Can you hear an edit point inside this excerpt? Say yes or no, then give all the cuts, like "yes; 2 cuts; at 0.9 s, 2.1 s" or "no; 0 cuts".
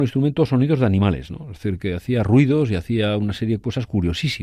no; 0 cuts